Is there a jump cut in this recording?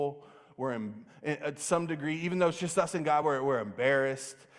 no; 0 cuts

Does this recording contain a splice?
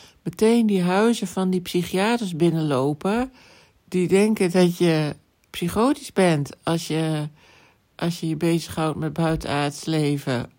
no; 0 cuts

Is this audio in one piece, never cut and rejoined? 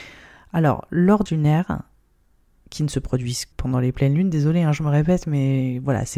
no; 2 cuts; at 1.3 s, 3.5 s

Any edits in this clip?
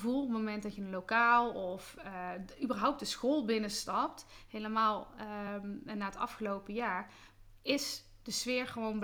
no; 0 cuts

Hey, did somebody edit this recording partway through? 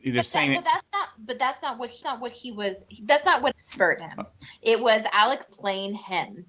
yes; 3 cuts; at 2.0 s, 3.5 s, 5.5 s

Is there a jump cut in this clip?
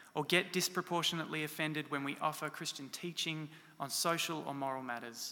no; 0 cuts

